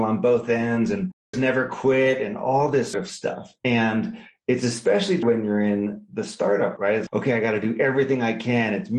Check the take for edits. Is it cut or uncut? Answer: cut